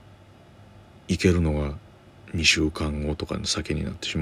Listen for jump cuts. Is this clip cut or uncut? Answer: cut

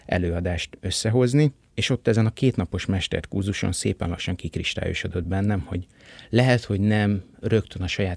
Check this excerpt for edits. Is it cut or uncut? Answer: uncut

